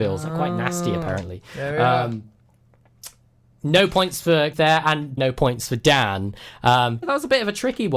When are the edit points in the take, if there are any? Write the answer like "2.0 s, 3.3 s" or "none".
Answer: 4.5 s, 5.2 s, 7.0 s